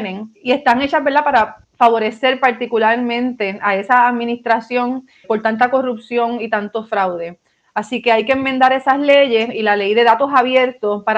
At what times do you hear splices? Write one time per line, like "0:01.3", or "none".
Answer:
0:01.6